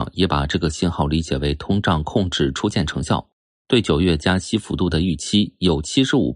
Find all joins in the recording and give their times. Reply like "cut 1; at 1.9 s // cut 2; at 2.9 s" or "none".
none